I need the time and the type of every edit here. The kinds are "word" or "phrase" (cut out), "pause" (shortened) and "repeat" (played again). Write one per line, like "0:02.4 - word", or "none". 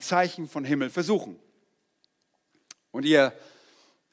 0:00.9 - phrase